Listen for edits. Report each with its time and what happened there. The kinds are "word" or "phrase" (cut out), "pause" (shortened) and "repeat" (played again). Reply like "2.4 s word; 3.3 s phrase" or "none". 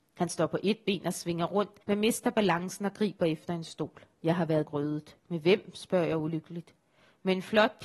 1.8 s pause; 4.1 s pause; 4.7 s phrase; 5.2 s pause